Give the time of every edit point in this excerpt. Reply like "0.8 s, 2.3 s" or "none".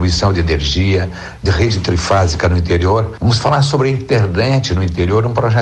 1.5 s